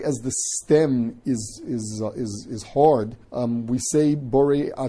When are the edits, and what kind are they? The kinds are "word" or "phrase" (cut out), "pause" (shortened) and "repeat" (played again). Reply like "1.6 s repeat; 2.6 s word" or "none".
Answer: 3.2 s pause